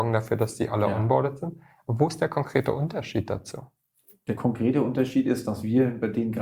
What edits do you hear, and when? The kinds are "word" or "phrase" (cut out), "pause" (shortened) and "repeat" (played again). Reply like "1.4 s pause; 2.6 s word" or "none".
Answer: none